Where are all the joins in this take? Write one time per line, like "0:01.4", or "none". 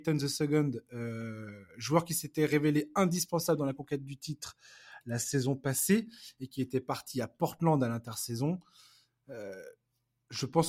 none